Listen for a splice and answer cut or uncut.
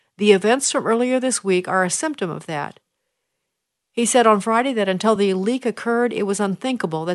uncut